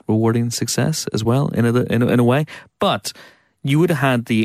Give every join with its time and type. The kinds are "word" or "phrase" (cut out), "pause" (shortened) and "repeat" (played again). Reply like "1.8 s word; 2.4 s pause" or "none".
none

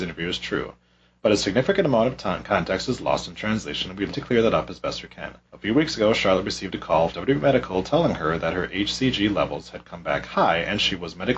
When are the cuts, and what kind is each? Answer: 4.1 s word; 5.5 s pause; 7.1 s word

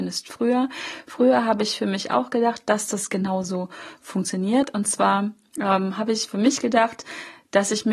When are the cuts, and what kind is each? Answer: none

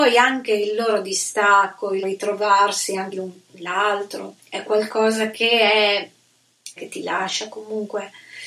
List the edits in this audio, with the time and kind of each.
2.0 s word; 3.1 s word; 4.4 s word; 6.8 s word

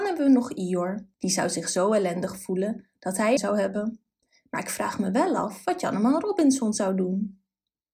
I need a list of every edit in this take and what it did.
1.1 s pause; 3.4 s phrase; 4.2 s pause

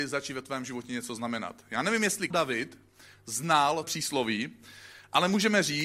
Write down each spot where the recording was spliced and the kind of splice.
2.3 s word; 3.8 s word

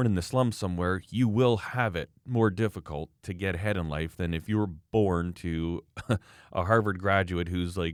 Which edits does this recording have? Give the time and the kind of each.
none

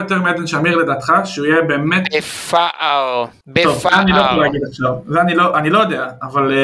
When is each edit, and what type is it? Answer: none

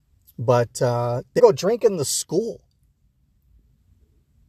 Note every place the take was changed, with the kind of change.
1.4 s word

